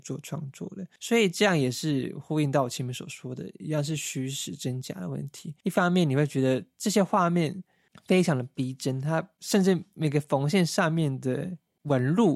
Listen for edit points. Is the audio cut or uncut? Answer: uncut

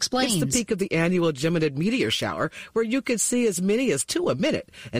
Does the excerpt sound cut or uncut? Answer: uncut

